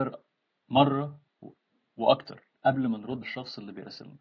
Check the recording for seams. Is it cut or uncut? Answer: cut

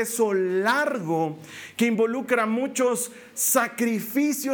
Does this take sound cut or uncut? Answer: uncut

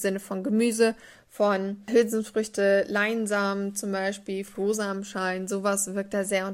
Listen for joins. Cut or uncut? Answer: uncut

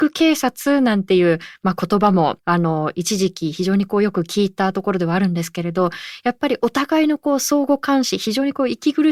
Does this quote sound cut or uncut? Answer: cut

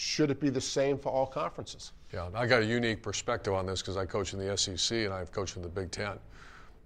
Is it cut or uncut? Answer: uncut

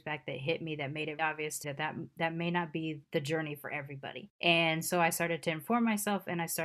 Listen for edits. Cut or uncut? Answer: cut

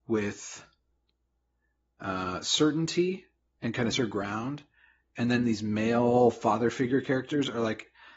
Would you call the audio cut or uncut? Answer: cut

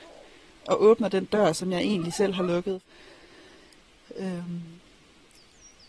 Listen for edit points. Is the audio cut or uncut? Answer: uncut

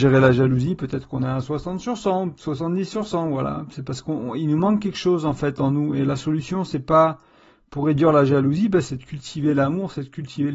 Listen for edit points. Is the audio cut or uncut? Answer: uncut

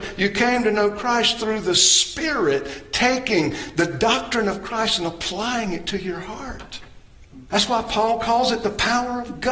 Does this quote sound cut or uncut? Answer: cut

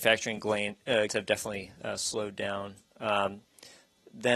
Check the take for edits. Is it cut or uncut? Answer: cut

